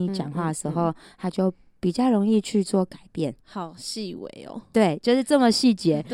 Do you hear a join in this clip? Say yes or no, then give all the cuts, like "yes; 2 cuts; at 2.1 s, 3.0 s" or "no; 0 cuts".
no; 0 cuts